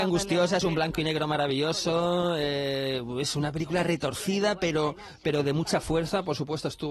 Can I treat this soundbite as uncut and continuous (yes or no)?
yes